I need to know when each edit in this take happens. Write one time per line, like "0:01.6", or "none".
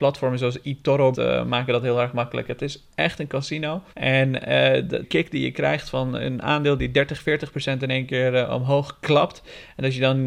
0:01.1
0:03.9
0:05.0